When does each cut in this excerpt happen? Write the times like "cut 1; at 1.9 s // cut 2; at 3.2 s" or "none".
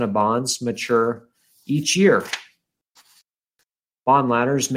none